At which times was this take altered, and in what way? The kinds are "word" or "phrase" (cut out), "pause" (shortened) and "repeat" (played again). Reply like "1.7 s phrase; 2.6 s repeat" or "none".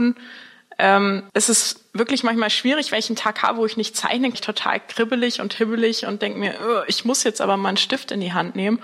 1.3 s pause; 4.3 s phrase